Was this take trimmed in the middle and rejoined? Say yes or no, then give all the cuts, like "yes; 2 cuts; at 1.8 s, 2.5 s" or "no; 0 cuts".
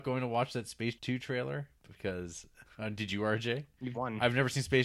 yes; 3 cuts; at 1.0 s, 2.6 s, 3.9 s